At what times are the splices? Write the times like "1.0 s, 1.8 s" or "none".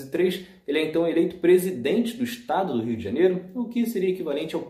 none